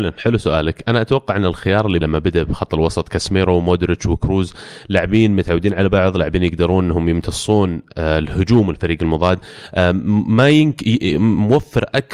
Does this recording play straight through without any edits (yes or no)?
no